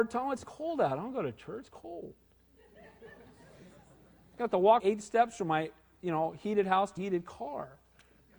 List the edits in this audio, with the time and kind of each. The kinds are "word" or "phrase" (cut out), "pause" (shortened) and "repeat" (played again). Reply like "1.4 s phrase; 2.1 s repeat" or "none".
4.8 s word; 7.0 s word